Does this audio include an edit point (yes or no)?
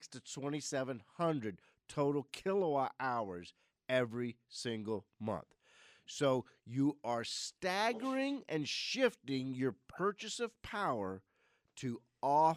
no